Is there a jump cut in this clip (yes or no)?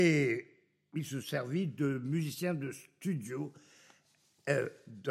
yes